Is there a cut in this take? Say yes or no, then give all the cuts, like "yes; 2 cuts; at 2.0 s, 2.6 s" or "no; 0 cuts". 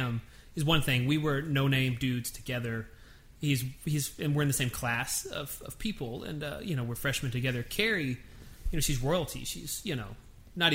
no; 0 cuts